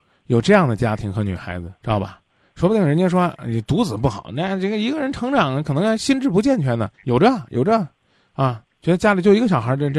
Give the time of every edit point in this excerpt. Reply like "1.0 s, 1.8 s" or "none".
1.8 s, 6.9 s, 8.7 s

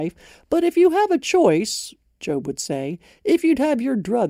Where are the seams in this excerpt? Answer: none

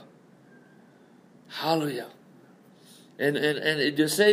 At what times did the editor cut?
none

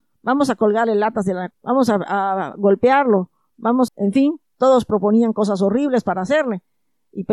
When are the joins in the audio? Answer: 1.5 s, 3.9 s

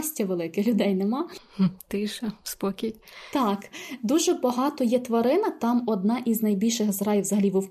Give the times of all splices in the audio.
none

